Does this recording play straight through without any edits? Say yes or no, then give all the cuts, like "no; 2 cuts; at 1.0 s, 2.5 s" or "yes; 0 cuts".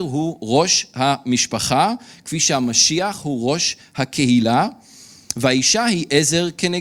yes; 0 cuts